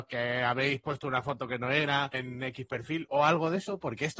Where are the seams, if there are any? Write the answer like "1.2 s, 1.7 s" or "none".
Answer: 2.1 s